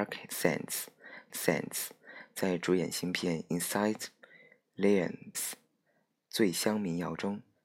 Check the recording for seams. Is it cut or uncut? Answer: cut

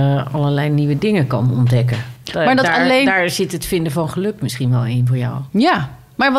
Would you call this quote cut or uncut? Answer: uncut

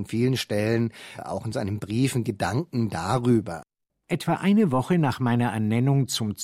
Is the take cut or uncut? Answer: uncut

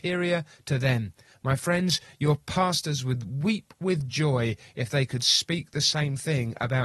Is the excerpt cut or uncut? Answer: uncut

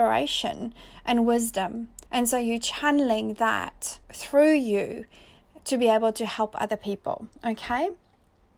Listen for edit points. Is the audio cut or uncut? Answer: cut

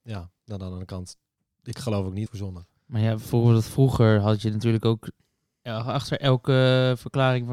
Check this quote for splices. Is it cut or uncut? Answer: cut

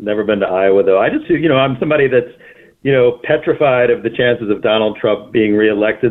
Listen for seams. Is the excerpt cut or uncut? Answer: cut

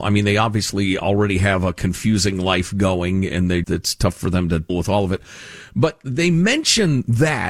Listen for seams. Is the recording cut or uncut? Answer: cut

